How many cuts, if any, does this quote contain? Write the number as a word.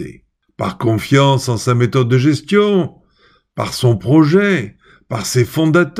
zero